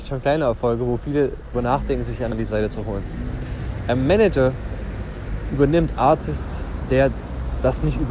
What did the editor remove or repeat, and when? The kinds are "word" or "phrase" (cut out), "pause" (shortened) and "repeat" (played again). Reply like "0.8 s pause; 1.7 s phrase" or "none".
1.5 s word; 2.3 s word; 5.9 s phrase